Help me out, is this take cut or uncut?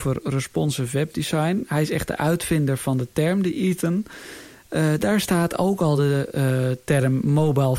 uncut